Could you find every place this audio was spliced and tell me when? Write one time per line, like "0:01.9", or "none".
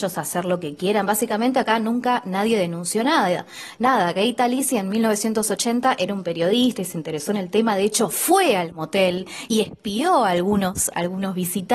none